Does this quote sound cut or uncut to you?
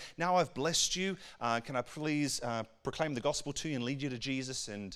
uncut